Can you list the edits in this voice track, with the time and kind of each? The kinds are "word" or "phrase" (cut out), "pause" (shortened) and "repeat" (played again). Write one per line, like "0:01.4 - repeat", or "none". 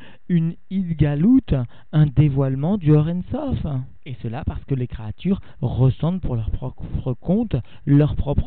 none